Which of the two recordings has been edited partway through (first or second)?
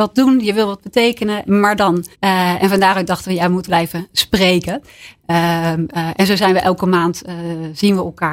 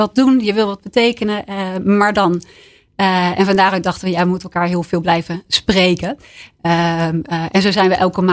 first